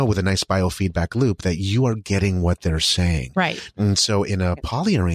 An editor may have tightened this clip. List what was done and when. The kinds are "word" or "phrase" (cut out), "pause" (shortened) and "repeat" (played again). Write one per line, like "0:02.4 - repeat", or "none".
none